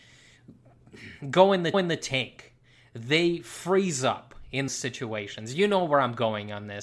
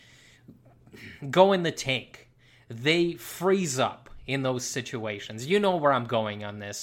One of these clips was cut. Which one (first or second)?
first